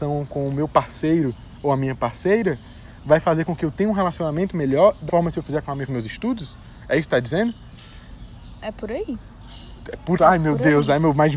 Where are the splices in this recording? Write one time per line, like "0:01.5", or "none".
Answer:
0:05.1
0:05.9
0:10.2